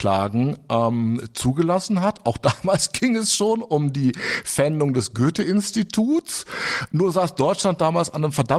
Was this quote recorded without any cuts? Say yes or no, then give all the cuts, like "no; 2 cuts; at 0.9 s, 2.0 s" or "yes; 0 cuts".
yes; 0 cuts